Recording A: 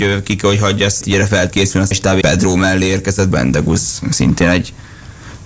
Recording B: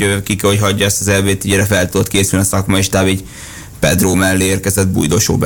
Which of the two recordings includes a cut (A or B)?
A